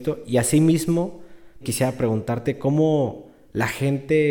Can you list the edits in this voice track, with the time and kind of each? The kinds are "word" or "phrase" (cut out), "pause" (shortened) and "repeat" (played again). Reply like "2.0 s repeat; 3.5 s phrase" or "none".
1.6 s word